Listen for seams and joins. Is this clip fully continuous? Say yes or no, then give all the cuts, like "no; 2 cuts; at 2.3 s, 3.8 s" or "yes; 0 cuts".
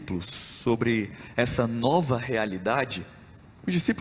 yes; 0 cuts